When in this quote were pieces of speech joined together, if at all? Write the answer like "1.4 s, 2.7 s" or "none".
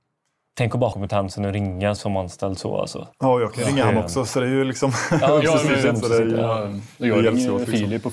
0.9 s, 2.0 s, 3.1 s, 6.0 s